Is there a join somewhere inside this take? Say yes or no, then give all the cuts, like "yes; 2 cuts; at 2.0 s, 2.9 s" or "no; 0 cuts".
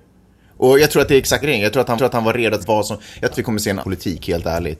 yes; 5 cuts; at 1.4 s, 2.0 s, 2.6 s, 3.3 s, 3.8 s